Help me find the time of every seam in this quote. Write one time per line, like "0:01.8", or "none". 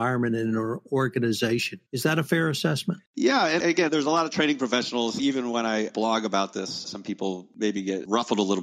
0:01.9
0:03.1